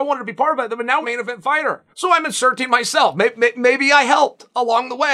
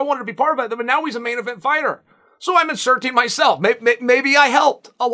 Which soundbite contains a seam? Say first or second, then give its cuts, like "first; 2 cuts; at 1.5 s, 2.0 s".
first; 2 cuts; at 1.0 s, 1.9 s